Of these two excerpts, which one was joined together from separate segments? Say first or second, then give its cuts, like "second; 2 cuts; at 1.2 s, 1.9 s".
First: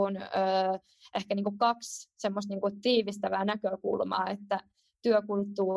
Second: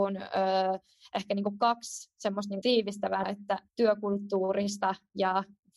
second; 3 cuts; at 2.6 s, 3.2 s, 3.7 s